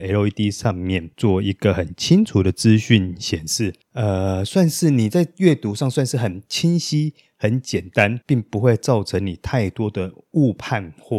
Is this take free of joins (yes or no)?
no